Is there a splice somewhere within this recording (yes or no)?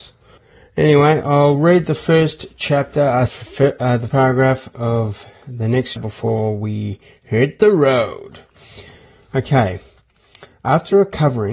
yes